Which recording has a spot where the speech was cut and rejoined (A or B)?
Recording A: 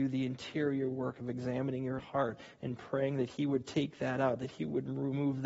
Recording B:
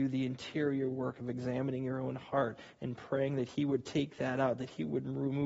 A